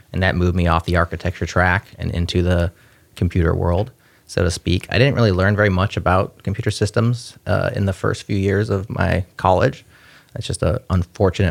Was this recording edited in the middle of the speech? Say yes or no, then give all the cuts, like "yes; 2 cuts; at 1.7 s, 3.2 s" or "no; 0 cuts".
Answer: no; 0 cuts